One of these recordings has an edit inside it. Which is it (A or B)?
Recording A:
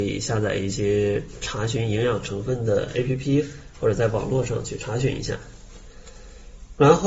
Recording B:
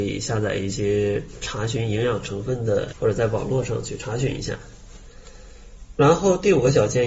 B